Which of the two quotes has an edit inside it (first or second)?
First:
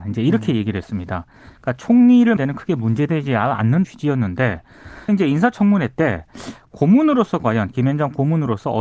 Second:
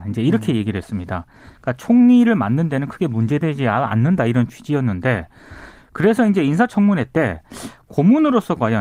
first